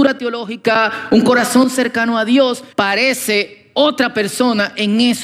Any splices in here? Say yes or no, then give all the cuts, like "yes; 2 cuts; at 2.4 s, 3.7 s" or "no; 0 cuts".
yes; 1 cut; at 2.7 s